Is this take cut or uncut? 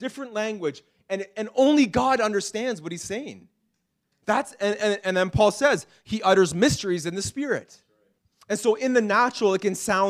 uncut